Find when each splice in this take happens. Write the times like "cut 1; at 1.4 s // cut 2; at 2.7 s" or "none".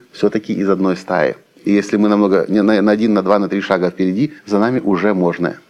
cut 1; at 4.4 s